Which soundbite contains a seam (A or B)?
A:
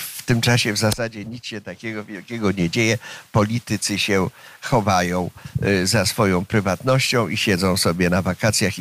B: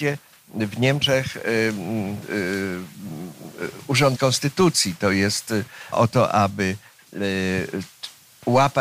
B